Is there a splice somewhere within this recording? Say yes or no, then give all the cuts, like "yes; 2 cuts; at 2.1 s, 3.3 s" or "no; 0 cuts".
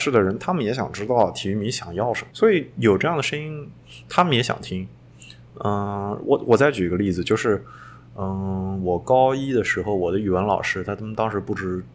yes; 1 cut; at 2.3 s